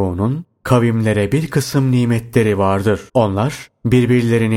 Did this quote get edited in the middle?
yes; 1 cut; at 3.1 s

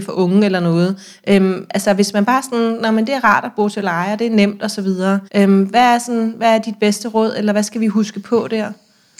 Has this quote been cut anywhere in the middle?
yes; 1 cut; at 5.3 s

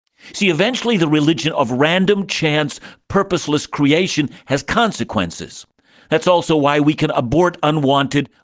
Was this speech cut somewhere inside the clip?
no; 0 cuts

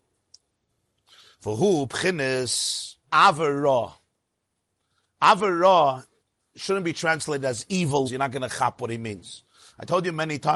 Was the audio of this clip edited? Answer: yes; 3 cuts; at 3.0 s, 6.2 s, 8.0 s

